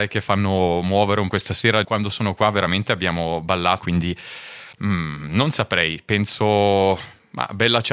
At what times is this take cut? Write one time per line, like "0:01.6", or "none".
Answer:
0:01.3
0:01.8
0:03.8
0:04.7